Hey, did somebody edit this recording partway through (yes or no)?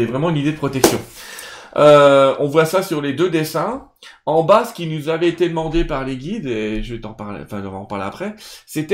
no